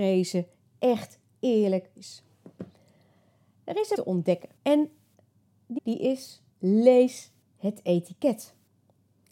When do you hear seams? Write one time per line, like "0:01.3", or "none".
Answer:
0:02.0
0:03.9
0:04.6
0:05.8
0:06.5